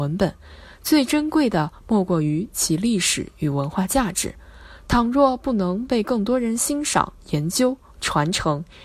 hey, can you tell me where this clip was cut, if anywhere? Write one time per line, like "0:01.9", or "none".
0:07.2